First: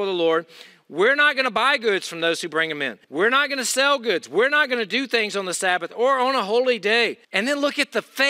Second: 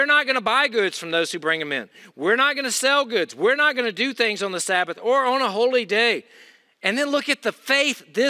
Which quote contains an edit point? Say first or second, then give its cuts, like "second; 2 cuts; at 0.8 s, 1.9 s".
first; 2 cuts; at 3.0 s, 7.2 s